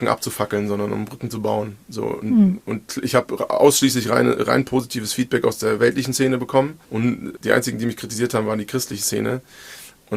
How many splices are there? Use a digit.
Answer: 1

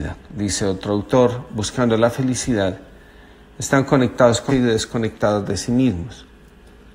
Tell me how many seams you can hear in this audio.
1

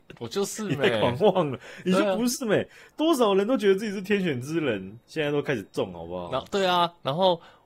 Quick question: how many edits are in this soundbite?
0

